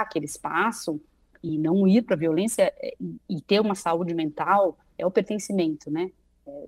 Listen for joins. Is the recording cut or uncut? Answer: uncut